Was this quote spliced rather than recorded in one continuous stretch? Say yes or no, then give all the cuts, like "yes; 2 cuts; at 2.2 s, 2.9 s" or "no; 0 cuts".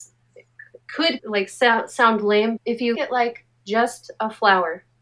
yes; 3 cuts; at 1.2 s, 2.6 s, 2.9 s